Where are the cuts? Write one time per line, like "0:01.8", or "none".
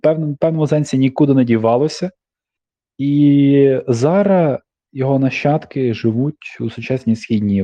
none